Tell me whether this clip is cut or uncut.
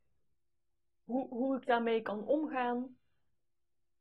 uncut